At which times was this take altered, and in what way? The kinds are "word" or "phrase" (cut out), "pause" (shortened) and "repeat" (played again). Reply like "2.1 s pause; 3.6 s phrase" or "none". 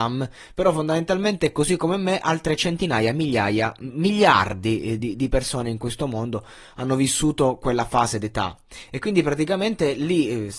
none

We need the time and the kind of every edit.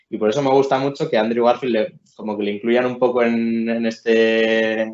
none

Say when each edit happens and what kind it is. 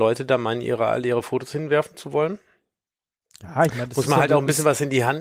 none

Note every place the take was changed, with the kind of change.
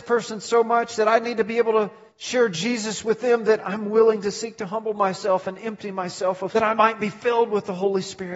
2.1 s pause; 6.5 s word

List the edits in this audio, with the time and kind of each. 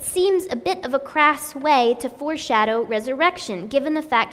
none

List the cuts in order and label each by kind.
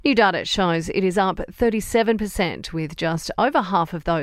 none

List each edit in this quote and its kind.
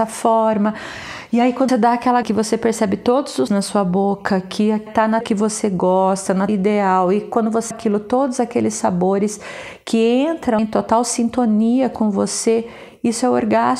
1.7 s word; 2.2 s word; 3.5 s word; 4.9 s word; 5.2 s word; 6.5 s word; 7.7 s word; 10.6 s word

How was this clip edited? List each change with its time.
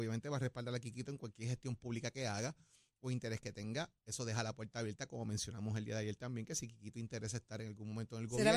none

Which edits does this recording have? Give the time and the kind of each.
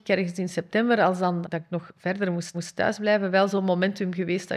1.4 s word; 2.5 s repeat

